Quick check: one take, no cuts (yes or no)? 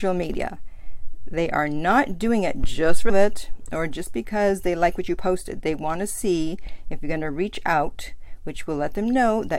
no